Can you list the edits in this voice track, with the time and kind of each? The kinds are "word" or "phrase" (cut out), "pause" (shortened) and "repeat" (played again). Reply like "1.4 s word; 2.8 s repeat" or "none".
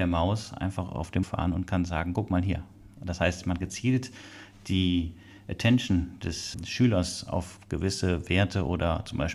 1.2 s word; 3.6 s word; 6.5 s word